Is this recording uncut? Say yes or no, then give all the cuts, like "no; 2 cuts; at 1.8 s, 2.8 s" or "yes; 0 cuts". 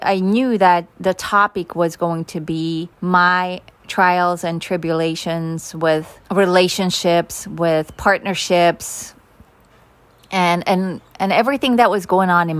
no; 2 cuts; at 2.9 s, 6.2 s